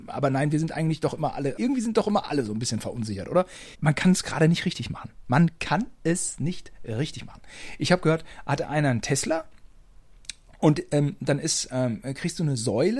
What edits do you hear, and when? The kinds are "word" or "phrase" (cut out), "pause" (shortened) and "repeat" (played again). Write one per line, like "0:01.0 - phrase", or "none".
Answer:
0:01.6 - word
0:03.7 - pause